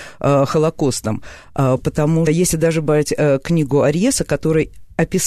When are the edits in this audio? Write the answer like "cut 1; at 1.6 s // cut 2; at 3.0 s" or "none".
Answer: cut 1; at 2.3 s